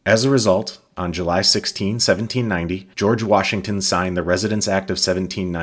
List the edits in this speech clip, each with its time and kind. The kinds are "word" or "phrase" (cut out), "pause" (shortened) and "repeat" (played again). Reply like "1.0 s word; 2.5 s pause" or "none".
2.9 s pause